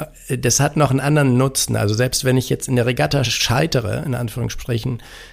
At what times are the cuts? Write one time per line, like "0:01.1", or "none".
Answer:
none